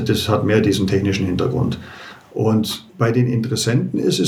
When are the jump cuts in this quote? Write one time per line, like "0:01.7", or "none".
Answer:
0:02.9